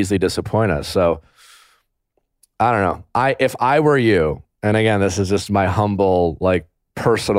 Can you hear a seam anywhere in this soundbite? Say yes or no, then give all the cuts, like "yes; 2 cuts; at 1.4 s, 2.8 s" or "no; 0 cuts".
no; 0 cuts